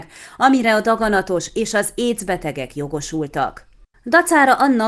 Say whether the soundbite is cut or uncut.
uncut